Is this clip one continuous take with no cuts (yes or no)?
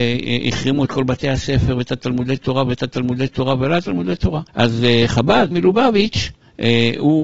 no